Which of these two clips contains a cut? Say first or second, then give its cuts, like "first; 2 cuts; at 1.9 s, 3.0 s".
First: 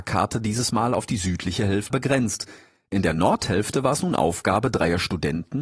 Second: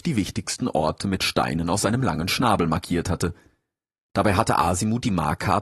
first; 1 cut; at 1.9 s